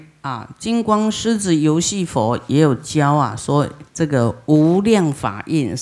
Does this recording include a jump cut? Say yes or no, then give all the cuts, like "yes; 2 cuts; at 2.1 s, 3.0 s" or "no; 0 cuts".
yes; 1 cut; at 3.9 s